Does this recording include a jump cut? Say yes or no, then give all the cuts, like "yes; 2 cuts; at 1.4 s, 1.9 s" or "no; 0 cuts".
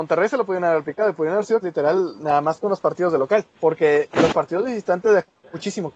yes; 2 cuts; at 1.6 s, 3.5 s